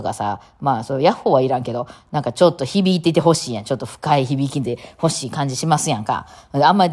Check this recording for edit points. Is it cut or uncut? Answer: uncut